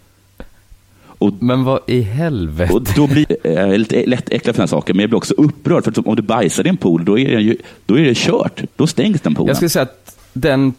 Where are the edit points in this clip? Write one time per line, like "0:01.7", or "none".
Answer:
0:03.2
0:08.7